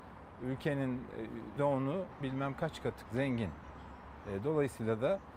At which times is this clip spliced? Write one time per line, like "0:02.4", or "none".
0:01.6
0:02.2
0:03.0